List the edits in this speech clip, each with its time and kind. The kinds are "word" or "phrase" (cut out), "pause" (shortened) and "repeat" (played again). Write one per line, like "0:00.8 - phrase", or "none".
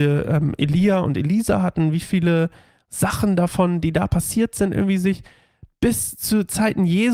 none